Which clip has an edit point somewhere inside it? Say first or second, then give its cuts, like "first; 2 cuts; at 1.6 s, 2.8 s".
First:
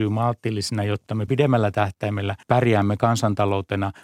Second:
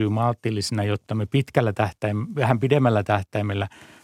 first; 2 cuts; at 1.3 s, 2.4 s